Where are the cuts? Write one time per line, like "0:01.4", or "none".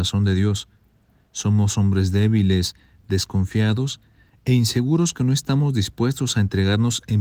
none